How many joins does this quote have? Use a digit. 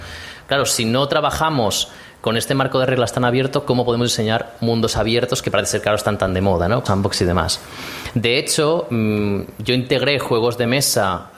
1